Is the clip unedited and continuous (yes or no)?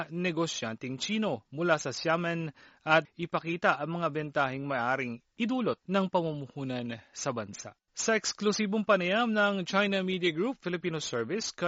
no